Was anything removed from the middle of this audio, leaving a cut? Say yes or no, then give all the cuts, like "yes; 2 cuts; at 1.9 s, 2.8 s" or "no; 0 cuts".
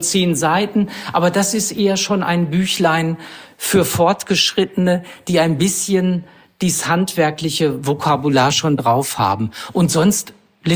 no; 0 cuts